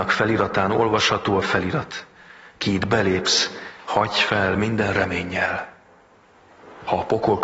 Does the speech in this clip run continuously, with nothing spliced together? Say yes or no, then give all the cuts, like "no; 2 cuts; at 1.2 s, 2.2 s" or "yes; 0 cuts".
yes; 0 cuts